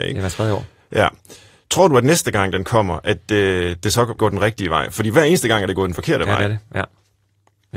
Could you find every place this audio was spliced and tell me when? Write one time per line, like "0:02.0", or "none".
0:04.2